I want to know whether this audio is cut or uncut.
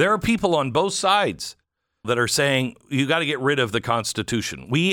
cut